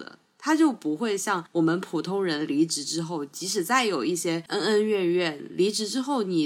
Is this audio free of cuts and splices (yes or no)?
yes